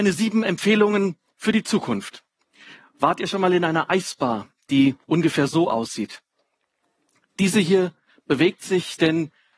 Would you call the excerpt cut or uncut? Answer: uncut